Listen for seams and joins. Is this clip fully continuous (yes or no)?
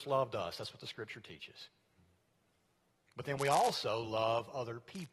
yes